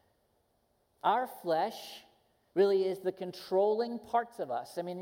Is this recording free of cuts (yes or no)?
yes